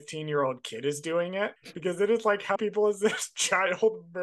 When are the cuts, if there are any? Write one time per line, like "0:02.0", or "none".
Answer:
0:02.6